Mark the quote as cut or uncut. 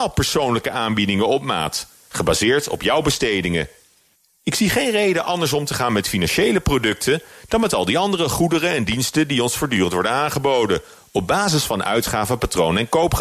uncut